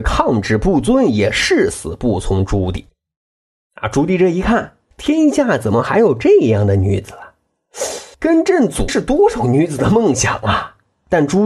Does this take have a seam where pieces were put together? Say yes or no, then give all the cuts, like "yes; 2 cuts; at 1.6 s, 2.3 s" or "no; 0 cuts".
yes; 3 cuts; at 4.9 s, 8.1 s, 8.9 s